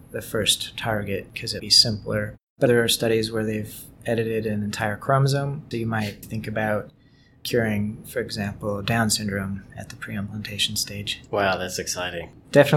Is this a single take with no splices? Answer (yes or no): no